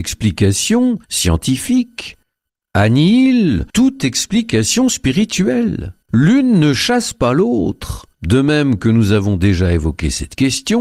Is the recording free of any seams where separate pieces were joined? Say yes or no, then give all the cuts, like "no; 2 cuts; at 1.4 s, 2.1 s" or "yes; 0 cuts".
no; 4 cuts; at 1.0 s, 3.7 s, 6.0 s, 8.1 s